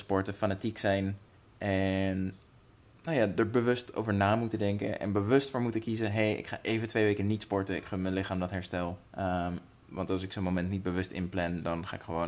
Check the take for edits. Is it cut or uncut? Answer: cut